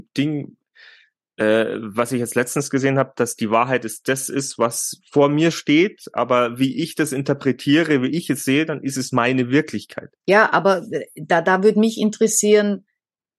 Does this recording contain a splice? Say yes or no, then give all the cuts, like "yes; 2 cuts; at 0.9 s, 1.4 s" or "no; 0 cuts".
yes; 1 cut; at 10.2 s